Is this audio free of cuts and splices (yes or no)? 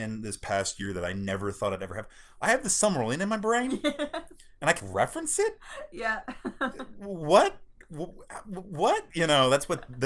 no